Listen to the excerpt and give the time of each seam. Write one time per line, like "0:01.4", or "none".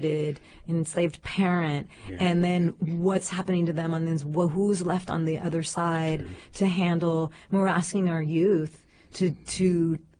none